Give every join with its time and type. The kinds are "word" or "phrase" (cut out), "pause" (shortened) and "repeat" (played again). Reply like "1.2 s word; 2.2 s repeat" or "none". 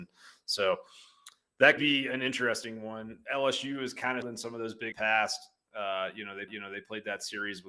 1.8 s word; 4.2 s word; 4.9 s phrase; 6.5 s repeat